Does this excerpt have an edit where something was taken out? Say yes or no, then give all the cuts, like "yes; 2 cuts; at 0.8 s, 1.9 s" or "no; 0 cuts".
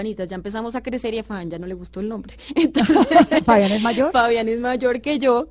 no; 0 cuts